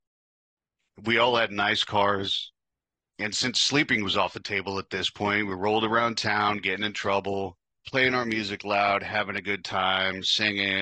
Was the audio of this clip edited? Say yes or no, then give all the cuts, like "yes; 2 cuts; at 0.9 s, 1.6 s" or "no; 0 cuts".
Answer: no; 0 cuts